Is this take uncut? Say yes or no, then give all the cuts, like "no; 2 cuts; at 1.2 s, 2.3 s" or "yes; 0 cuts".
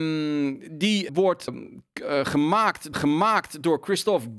no; 3 cuts; at 1.1 s, 1.5 s, 2.9 s